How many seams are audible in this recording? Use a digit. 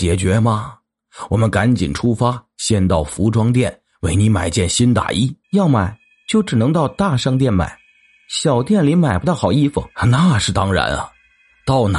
2